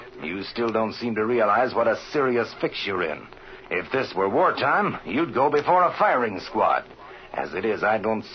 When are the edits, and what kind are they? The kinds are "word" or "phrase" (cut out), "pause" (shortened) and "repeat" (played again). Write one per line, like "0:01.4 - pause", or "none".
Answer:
none